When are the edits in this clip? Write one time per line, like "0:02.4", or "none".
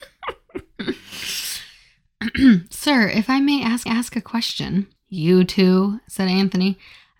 0:03.9
0:05.0